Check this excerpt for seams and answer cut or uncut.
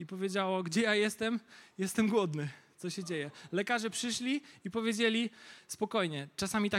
uncut